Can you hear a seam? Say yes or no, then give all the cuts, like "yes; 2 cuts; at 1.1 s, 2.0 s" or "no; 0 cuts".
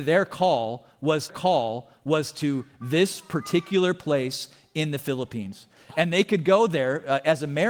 yes; 1 cut; at 1.3 s